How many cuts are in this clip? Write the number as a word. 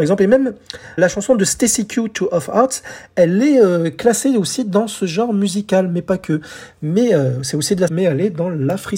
two